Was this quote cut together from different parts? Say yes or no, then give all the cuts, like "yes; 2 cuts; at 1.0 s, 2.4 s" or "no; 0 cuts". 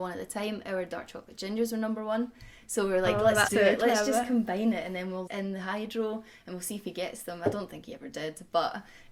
yes; 2 cuts; at 3.5 s, 5.3 s